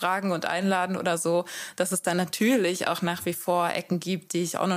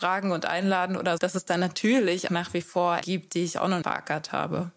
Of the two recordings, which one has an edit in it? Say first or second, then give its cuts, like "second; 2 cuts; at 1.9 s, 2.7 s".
second; 4 cuts; at 1.2 s, 2.3 s, 3.0 s, 3.8 s